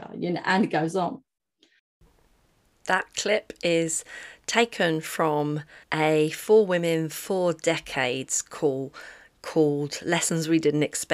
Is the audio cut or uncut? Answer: cut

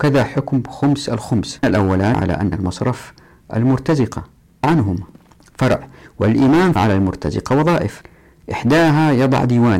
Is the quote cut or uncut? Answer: cut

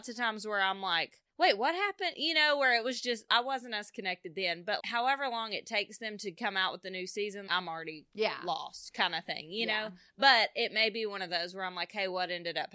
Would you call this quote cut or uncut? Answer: cut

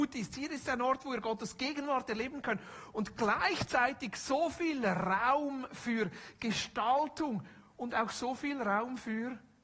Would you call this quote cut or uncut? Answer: uncut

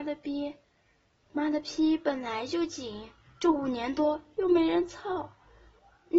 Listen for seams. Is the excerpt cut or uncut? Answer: uncut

